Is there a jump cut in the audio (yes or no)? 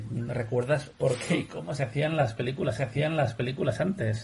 yes